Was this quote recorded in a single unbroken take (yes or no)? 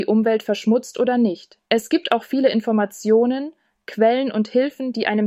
no